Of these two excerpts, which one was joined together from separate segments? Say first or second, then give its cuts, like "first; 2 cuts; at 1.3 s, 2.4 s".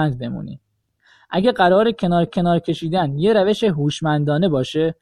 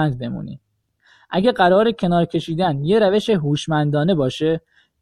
first; 1 cut; at 2.3 s